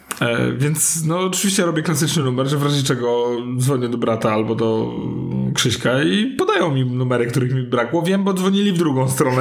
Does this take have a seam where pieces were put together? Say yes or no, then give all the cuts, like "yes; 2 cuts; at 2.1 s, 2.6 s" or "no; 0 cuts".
no; 0 cuts